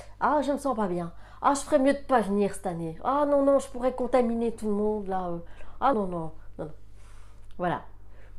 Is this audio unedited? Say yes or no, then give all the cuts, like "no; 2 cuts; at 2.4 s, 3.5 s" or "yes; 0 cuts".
no; 1 cut; at 5.9 s